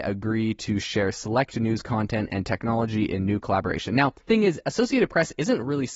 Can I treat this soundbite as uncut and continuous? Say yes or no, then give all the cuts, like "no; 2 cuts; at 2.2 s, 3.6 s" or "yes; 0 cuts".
no; 1 cut; at 4.3 s